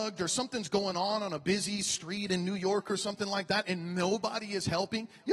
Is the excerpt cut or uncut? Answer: uncut